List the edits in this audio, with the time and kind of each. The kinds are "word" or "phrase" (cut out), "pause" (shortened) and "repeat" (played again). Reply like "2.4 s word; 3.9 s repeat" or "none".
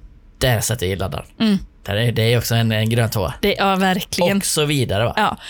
1.7 s pause